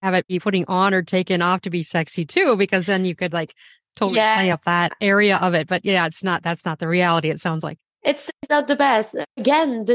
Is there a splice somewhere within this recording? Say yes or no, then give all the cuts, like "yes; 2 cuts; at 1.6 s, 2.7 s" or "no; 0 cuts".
no; 0 cuts